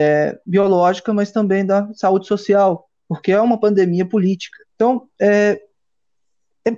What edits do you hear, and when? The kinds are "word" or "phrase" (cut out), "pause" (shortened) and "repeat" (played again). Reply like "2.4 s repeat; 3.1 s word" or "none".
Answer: 4.7 s pause